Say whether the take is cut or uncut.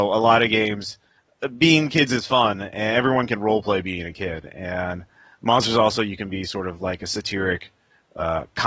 uncut